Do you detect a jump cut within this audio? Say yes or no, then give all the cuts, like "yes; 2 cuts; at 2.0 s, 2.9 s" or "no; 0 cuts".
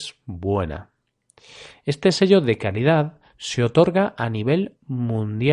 no; 0 cuts